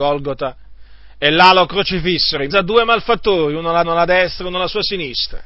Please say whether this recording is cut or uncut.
cut